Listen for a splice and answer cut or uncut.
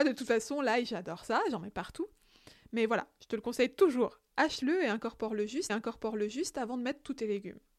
cut